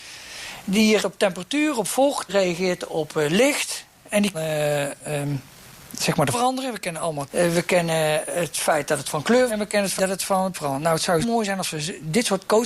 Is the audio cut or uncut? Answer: cut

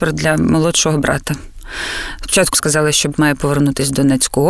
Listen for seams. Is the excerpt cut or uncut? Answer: cut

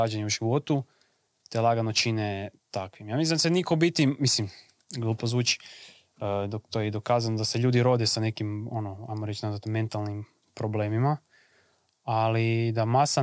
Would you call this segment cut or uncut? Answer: uncut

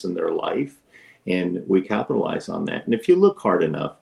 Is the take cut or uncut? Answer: cut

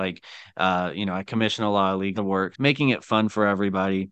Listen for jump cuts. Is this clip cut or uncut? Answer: cut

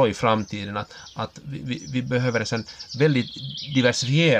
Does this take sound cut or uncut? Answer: uncut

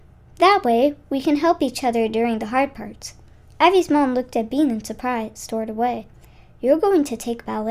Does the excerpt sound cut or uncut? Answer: uncut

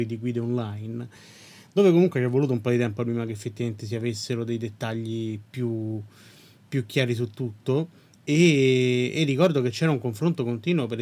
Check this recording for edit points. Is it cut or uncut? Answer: uncut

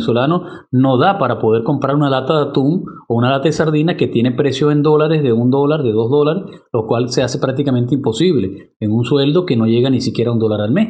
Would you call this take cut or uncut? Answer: uncut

